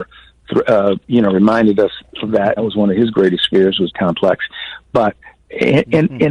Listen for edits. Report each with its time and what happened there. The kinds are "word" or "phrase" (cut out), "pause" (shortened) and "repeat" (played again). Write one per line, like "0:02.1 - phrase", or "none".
0:02.6 - word
0:03.9 - phrase